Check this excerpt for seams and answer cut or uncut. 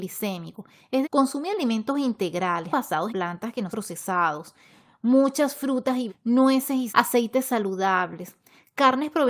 cut